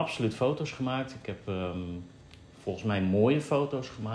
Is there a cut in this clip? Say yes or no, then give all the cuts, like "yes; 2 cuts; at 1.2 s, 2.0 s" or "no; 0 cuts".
no; 0 cuts